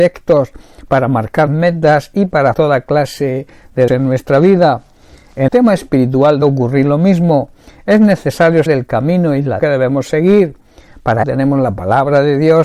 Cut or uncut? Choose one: cut